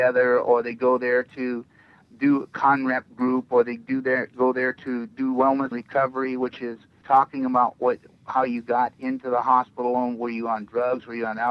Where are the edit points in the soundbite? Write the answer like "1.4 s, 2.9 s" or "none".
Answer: 5.7 s, 7.0 s